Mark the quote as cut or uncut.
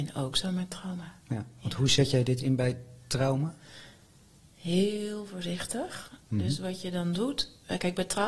uncut